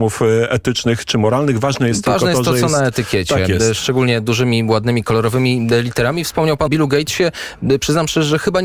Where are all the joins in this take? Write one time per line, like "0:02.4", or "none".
0:06.7